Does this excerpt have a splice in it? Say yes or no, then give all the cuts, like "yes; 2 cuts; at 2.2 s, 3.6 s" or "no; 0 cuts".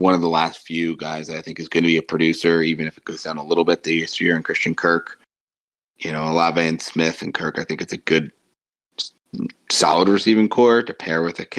no; 0 cuts